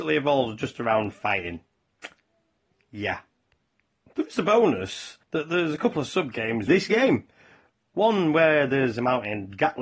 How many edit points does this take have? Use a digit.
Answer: 2